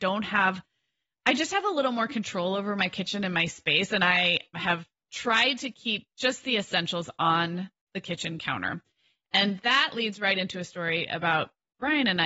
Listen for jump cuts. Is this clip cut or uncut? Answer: cut